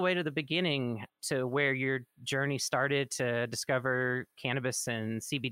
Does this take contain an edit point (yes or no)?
yes